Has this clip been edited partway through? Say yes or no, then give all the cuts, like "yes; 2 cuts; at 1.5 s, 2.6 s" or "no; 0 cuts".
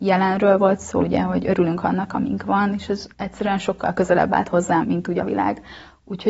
yes; 4 cuts; at 1.0 s, 3.1 s, 4.8 s, 5.2 s